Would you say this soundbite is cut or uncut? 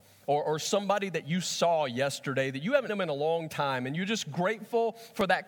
cut